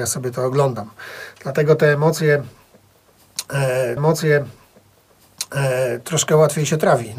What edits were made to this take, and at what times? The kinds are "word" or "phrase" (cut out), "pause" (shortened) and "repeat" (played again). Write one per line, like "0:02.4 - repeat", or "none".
0:04.0 - repeat